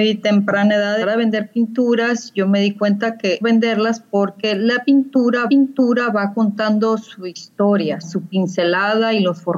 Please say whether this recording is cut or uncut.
cut